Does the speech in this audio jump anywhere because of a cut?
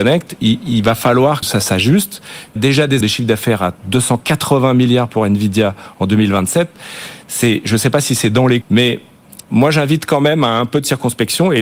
yes; 7 cuts; at 1.4 s, 2.6 s, 3.0 s, 3.8 s, 7.2 s, 8.6 s, 9.4 s

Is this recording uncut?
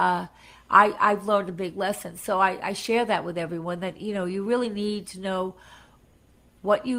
yes; 0 cuts

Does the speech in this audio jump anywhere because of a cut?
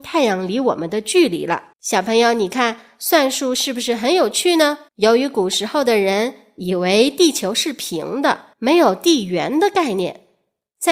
yes; 3 cuts; at 1.7 s, 4.9 s, 8.5 s

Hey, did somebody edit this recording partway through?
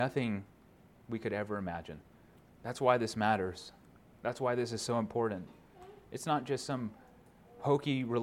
yes; 2 cuts; at 2.4 s, 4.0 s

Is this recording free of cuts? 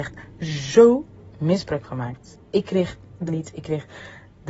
no; 3 cuts; at 1.8 s, 2.4 s, 3.3 s

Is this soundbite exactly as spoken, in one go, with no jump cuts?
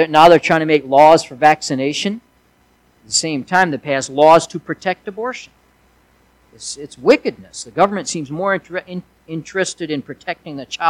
yes; 0 cuts

